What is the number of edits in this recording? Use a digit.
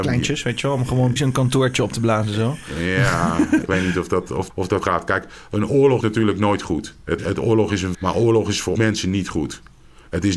8